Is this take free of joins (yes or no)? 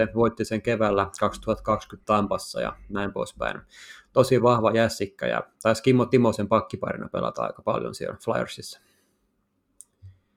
yes